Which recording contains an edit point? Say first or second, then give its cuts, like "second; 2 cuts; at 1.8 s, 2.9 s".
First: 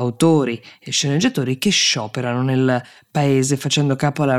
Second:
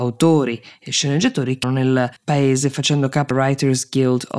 second; 3 cuts; at 1.6 s, 2.2 s, 3.3 s